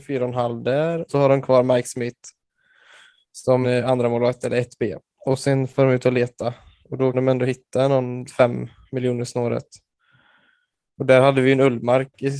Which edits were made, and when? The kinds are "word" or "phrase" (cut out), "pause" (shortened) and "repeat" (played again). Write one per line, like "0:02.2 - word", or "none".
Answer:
0:01.1 - word
0:03.6 - word
0:07.1 - word
0:08.3 - word